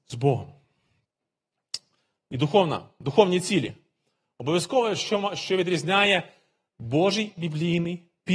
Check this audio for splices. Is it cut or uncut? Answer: uncut